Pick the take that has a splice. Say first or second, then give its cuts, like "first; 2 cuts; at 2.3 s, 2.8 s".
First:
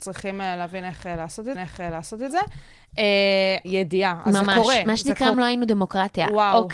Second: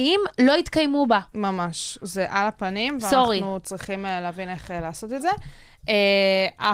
first; 3 cuts; at 1.5 s, 3.6 s, 5.3 s